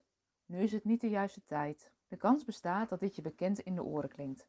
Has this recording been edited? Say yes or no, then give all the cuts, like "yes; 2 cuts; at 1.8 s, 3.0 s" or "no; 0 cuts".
yes; 1 cut; at 2.0 s